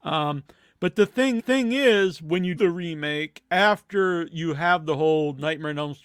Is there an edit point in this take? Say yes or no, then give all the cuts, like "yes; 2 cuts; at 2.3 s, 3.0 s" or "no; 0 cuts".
yes; 2 cuts; at 1.4 s, 2.6 s